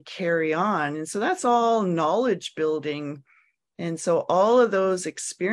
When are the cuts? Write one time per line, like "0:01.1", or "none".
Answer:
none